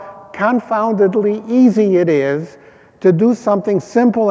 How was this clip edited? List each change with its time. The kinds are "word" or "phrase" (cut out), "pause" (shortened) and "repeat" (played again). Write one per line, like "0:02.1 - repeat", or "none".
none